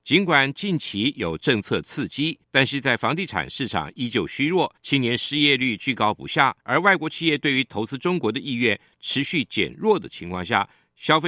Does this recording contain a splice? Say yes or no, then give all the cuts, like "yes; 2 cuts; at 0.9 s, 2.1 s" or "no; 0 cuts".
yes; 3 cuts; at 2.4 s, 4.8 s, 6.6 s